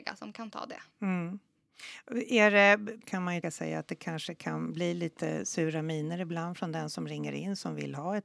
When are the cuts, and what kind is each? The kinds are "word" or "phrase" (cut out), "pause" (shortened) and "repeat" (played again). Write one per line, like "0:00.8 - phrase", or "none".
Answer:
0:03.0 - word
0:03.4 - word